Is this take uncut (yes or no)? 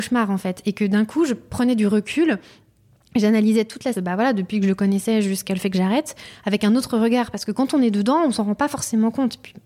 no